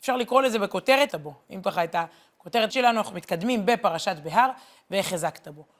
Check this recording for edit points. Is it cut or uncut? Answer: cut